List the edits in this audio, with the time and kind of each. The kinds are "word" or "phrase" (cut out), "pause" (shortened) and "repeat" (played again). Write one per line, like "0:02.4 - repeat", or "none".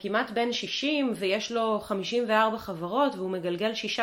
none